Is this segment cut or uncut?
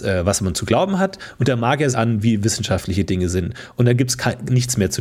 cut